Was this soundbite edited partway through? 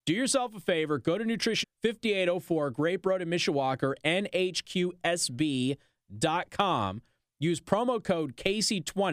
yes; 1 cut; at 1.6 s

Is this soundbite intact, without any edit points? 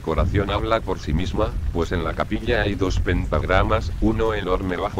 yes; 0 cuts

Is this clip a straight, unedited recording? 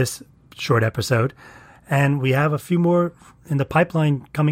yes; 0 cuts

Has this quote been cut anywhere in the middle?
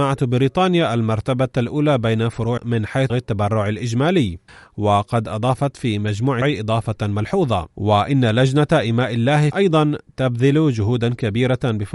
yes; 6 cuts; at 2.6 s, 3.1 s, 4.5 s, 6.4 s, 7.7 s, 9.5 s

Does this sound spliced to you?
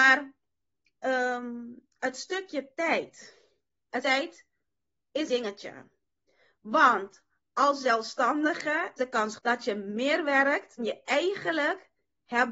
yes; 5 cuts; at 4.0 s, 5.3 s, 9.0 s, 9.4 s, 10.8 s

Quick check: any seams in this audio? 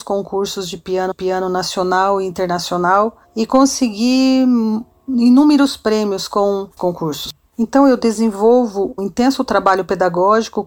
yes; 3 cuts; at 1.1 s, 6.8 s, 9.0 s

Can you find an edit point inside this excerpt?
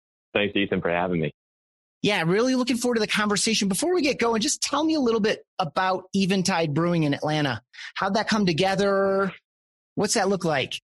no; 0 cuts

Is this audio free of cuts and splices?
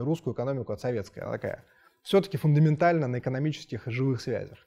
yes; 0 cuts

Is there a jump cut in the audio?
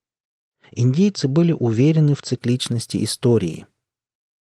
no; 0 cuts

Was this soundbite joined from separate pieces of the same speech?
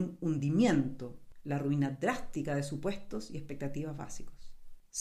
no; 0 cuts

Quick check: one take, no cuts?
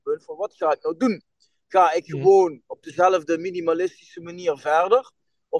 yes; 0 cuts

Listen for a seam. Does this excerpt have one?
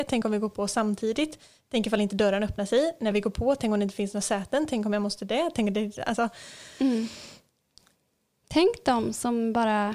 no; 0 cuts

